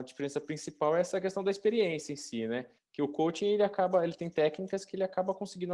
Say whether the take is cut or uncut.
cut